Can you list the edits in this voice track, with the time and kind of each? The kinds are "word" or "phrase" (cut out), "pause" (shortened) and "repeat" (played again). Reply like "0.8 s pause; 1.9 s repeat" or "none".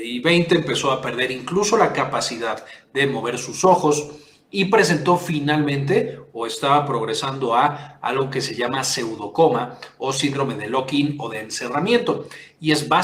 none

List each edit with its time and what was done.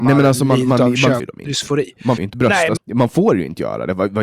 1.2 s word; 2.2 s word; 2.8 s word

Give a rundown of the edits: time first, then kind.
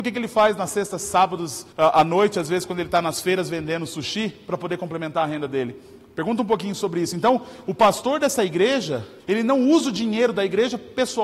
1.7 s pause; 9.2 s pause

